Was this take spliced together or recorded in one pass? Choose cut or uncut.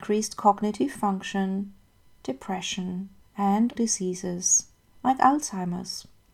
cut